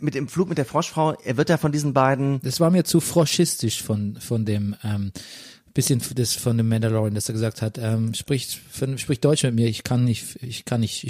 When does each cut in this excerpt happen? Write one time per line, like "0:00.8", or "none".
none